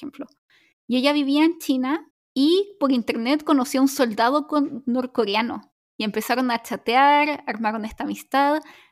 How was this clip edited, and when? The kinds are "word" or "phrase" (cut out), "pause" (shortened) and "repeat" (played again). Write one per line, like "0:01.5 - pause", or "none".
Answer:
0:02.1 - pause